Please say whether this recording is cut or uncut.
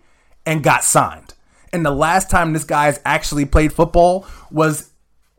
uncut